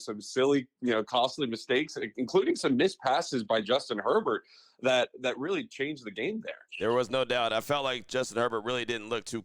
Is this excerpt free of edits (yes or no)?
yes